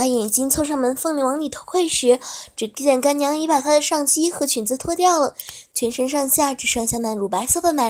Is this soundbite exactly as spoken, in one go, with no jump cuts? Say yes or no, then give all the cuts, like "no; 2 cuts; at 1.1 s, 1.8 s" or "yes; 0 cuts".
yes; 0 cuts